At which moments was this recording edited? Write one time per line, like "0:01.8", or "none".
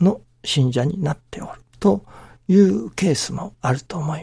0:01.7